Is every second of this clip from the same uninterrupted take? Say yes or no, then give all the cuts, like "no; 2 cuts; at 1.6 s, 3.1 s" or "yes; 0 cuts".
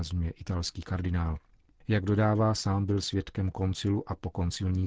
yes; 0 cuts